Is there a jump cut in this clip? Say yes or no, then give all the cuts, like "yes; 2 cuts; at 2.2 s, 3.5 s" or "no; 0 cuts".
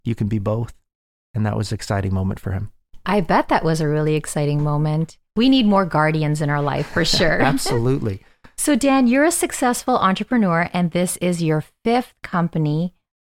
no; 0 cuts